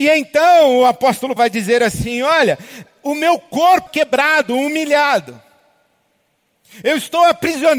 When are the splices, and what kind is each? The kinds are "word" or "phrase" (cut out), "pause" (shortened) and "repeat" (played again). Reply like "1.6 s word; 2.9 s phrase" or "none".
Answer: 1.4 s word; 3.9 s word